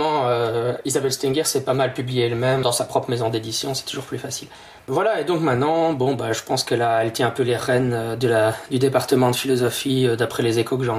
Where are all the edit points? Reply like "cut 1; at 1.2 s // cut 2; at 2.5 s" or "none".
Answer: cut 1; at 2.6 s // cut 2; at 4.8 s